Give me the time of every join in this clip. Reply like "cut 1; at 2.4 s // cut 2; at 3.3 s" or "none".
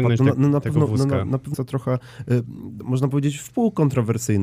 cut 1; at 1.5 s